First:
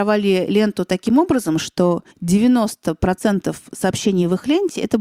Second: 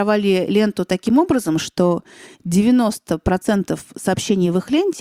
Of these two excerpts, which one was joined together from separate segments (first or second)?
first